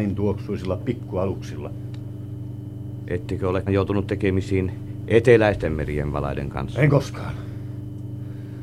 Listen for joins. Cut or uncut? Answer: cut